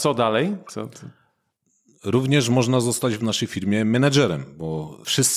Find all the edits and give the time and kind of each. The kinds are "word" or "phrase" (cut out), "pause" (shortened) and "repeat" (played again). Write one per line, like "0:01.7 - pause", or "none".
none